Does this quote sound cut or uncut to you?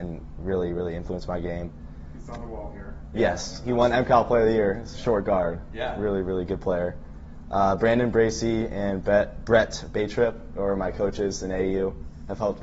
uncut